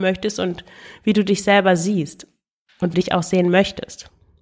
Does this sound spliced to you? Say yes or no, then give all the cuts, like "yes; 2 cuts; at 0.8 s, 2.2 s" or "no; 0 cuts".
yes; 1 cut; at 2.9 s